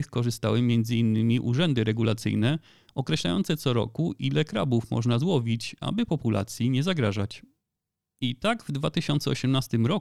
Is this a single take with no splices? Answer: yes; 0 cuts

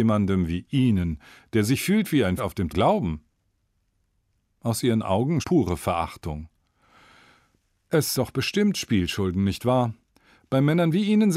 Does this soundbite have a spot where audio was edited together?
yes; 4 cuts; at 2.4 s, 2.7 s, 5.4 s, 8.1 s

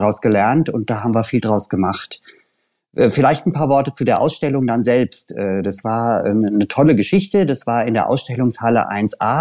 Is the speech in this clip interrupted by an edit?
no; 0 cuts

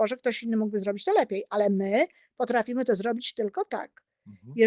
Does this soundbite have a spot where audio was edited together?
no; 0 cuts

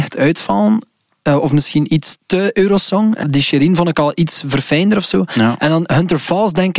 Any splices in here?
yes; 1 cut; at 3.2 s

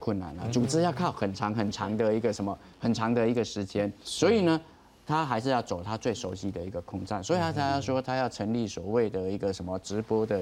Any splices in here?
no; 0 cuts

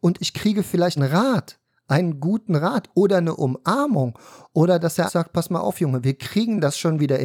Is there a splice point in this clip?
yes; 2 cuts; at 1.0 s, 5.1 s

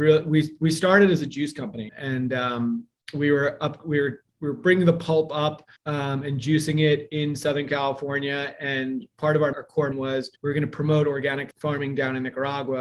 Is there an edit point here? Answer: yes; 6 cuts; at 1.9 s, 5.8 s, 9.5 s, 9.9 s, 10.4 s, 11.5 s

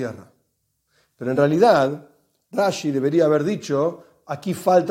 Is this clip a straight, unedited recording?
yes; 0 cuts

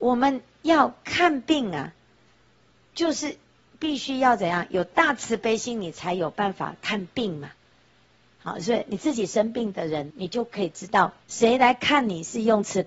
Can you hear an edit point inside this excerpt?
yes; 2 cuts; at 10.1 s, 11.2 s

